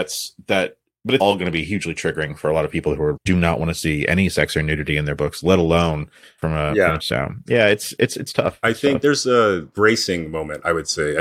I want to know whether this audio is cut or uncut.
cut